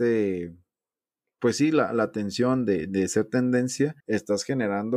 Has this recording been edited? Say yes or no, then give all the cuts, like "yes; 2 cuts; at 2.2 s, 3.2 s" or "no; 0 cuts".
yes; 1 cut; at 4.0 s